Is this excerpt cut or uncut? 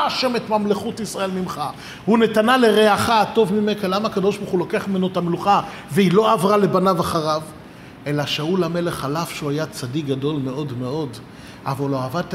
uncut